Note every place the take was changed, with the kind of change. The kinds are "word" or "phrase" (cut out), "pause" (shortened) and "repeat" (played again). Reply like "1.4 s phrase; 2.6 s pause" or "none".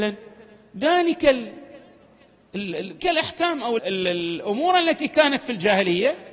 3.0 s word; 3.8 s word